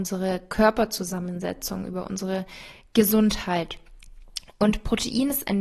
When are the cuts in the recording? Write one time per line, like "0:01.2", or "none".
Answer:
none